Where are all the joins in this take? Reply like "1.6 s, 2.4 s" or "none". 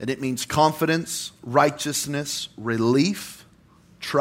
none

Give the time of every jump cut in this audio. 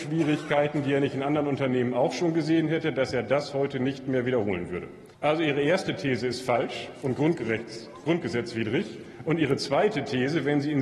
5.1 s

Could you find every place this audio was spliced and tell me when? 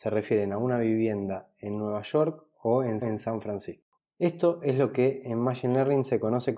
3.0 s, 4.0 s

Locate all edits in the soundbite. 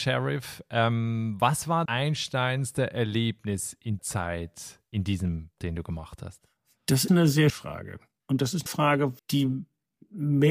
1.9 s, 4.0 s, 5.6 s, 7.1 s, 7.5 s, 8.7 s, 9.2 s

